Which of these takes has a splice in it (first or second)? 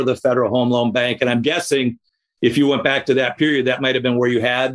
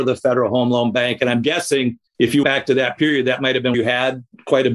second